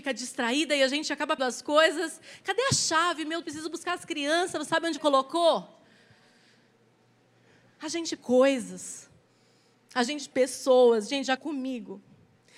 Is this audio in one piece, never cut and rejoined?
no; 7 cuts; at 1.4 s, 3.4 s, 4.7 s, 5.0 s, 8.2 s, 10.3 s, 11.4 s

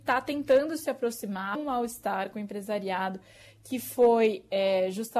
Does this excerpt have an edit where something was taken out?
yes; 1 cut; at 1.5 s

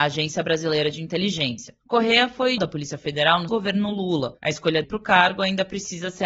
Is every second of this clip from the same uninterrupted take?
no; 3 cuts; at 2.6 s, 3.5 s, 4.8 s

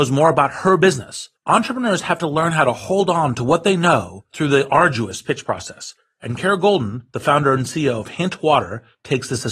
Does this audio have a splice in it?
yes; 1 cut; at 1.4 s

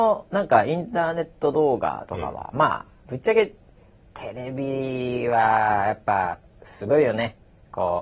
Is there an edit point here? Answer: no; 0 cuts

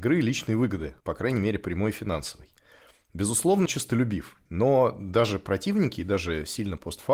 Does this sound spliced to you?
yes; 3 cuts; at 1.0 s, 3.7 s, 4.5 s

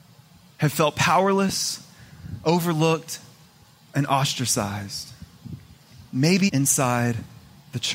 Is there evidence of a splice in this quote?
yes; 1 cut; at 6.5 s

